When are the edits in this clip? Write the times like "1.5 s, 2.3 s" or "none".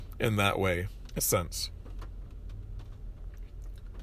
1.2 s